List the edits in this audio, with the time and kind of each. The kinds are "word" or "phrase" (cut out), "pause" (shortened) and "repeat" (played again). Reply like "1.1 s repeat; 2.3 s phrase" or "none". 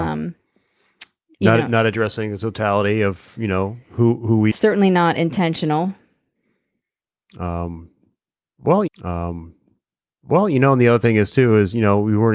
4.5 s phrase; 8.9 s repeat